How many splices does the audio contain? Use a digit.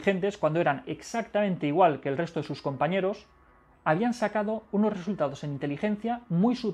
0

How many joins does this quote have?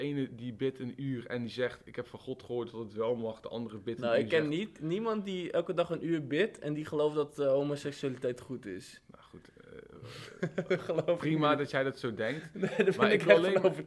0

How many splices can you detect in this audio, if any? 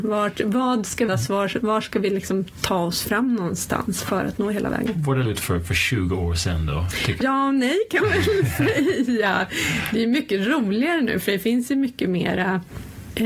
4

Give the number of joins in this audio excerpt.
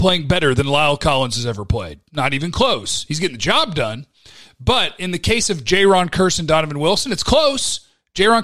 0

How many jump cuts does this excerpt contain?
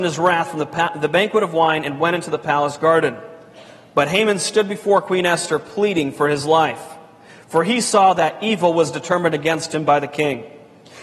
0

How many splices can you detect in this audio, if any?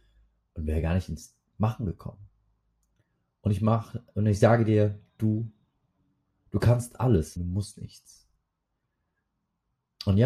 1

